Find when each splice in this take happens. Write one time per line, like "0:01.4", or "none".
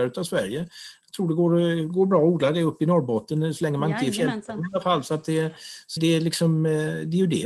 0:06.0